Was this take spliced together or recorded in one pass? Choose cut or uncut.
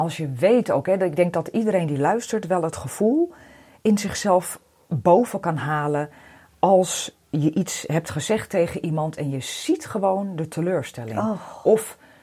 uncut